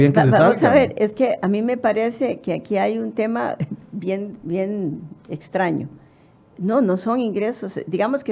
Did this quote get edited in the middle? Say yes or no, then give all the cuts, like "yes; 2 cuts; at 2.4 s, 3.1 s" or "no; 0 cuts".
no; 0 cuts